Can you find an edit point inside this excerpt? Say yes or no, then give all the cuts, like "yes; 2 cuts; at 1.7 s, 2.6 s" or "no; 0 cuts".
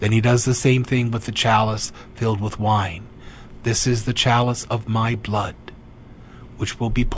no; 0 cuts